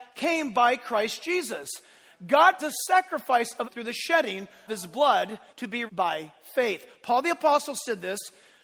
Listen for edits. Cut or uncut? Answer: cut